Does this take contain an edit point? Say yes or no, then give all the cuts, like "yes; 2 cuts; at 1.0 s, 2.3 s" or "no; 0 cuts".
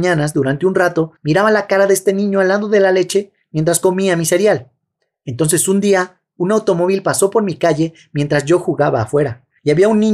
yes; 1 cut; at 1.2 s